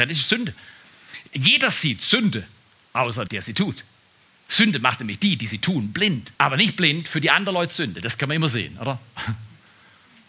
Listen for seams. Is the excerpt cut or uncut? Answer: cut